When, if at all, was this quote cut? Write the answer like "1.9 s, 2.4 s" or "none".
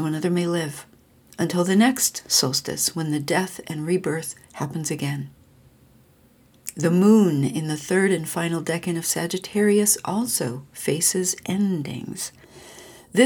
1.1 s, 4.4 s